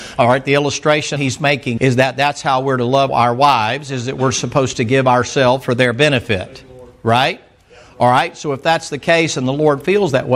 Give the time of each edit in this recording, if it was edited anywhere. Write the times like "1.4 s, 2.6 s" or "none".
1.2 s, 1.8 s, 3.1 s

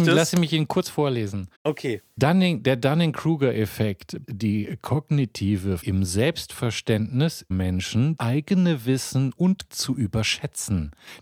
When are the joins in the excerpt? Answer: 1.5 s, 4.2 s, 5.8 s, 7.5 s, 8.2 s, 9.7 s

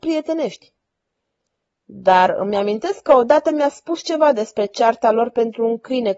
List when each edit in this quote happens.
none

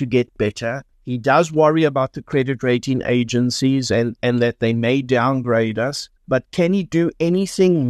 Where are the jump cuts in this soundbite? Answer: 0.9 s, 6.2 s

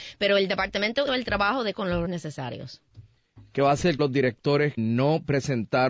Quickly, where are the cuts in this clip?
1.1 s, 1.7 s, 2.0 s, 4.0 s, 4.8 s

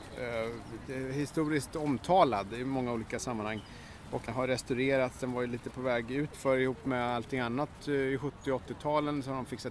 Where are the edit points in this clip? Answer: 4.3 s

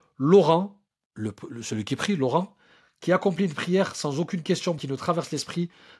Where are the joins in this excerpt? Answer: 4.8 s

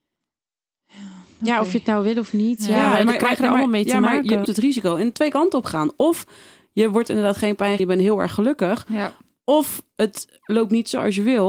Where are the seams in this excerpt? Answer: 4.5 s, 5.1 s, 7.8 s

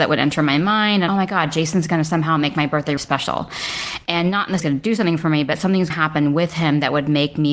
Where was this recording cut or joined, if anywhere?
1.1 s, 3.0 s, 4.6 s, 5.9 s

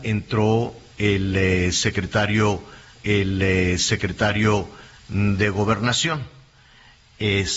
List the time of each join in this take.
3.0 s

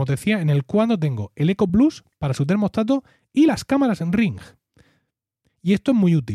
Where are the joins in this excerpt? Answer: none

